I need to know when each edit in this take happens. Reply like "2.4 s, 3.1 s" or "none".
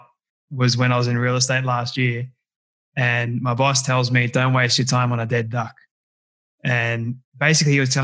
none